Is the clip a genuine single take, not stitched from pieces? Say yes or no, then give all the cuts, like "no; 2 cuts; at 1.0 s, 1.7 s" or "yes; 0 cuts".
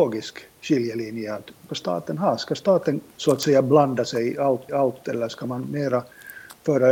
no; 3 cuts; at 1.7 s, 3.1 s, 4.7 s